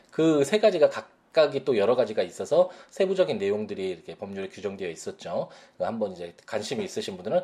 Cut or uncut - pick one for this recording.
uncut